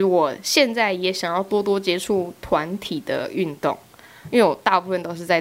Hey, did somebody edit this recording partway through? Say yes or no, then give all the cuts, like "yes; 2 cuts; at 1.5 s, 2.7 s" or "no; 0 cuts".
no; 0 cuts